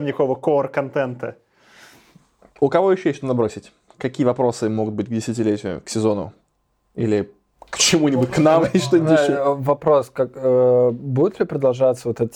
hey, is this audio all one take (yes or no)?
yes